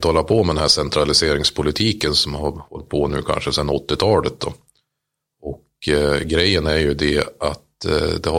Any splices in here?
no; 0 cuts

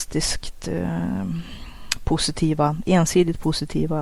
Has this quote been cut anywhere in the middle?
no; 0 cuts

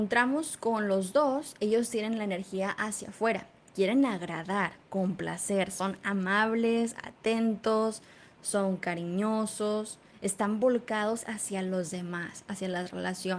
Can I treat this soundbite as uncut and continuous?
yes; 0 cuts

